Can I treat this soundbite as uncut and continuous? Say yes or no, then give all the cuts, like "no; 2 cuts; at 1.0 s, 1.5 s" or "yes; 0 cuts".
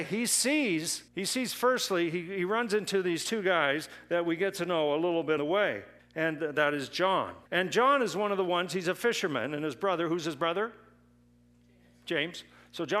no; 4 cuts; at 1.1 s, 5.4 s, 6.0 s, 7.5 s